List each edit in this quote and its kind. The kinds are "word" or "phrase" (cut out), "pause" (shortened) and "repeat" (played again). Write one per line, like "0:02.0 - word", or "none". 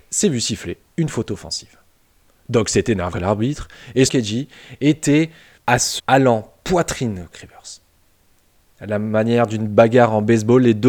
0:03.1 - word
0:04.1 - word
0:05.6 - word
0:06.0 - word
0:07.3 - phrase